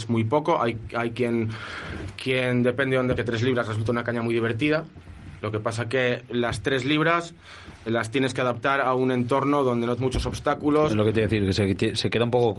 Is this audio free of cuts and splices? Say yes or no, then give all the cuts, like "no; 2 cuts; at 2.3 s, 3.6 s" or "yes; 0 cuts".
no; 3 cuts; at 3.2 s, 7.9 s, 10.0 s